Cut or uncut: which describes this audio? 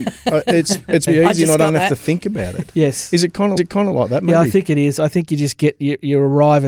cut